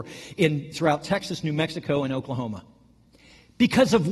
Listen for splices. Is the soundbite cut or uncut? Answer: uncut